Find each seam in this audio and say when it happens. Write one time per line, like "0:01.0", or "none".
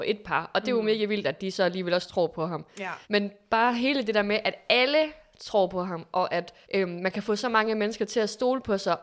0:03.0
0:06.6